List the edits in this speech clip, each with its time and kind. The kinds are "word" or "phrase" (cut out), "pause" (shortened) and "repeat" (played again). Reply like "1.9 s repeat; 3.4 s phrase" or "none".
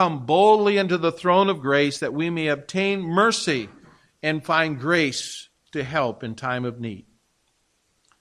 none